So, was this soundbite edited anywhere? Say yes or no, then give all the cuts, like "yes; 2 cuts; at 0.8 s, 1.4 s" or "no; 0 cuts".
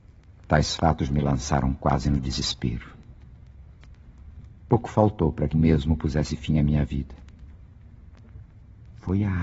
yes; 1 cut; at 5.5 s